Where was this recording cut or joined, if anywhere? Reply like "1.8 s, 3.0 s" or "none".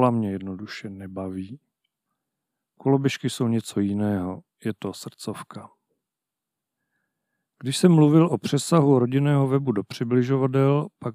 none